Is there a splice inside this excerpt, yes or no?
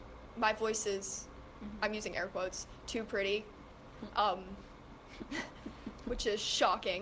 no